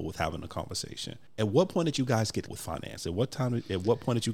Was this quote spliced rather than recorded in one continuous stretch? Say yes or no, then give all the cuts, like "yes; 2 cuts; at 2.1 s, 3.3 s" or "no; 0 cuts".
yes; 1 cut; at 2.5 s